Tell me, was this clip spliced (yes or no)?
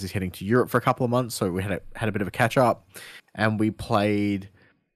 no